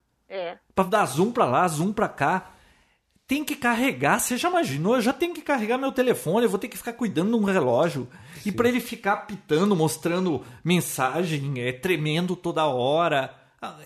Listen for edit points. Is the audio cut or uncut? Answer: uncut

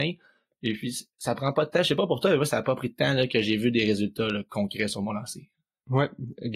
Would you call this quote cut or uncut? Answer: cut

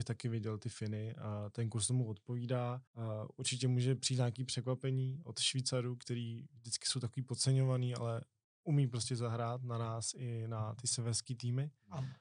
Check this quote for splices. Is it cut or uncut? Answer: cut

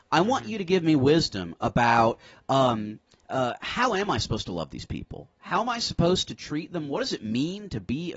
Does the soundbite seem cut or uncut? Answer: uncut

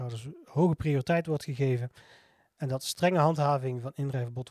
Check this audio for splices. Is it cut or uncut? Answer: uncut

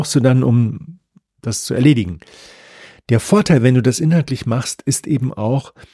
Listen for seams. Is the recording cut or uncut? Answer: uncut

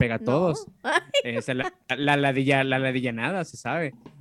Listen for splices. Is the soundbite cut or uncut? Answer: uncut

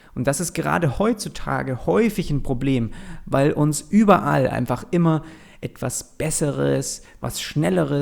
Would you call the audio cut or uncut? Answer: uncut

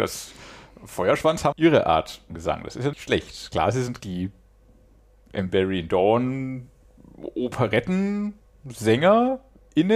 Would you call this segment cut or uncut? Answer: cut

